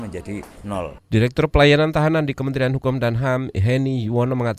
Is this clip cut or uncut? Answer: uncut